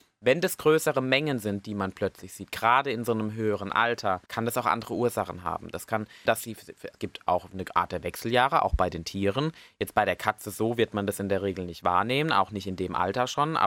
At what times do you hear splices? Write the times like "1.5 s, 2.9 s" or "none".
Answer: 4.3 s, 6.3 s, 6.9 s